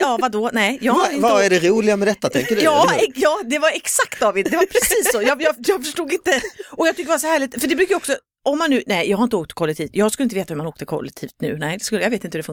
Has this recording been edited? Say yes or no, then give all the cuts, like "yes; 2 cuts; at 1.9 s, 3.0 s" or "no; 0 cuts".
no; 0 cuts